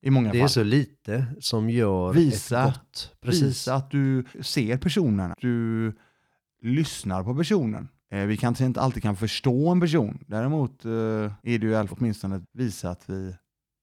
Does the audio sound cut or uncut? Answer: cut